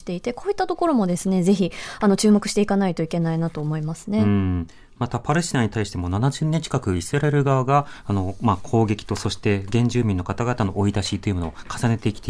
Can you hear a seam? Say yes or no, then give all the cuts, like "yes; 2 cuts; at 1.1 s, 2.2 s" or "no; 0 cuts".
no; 0 cuts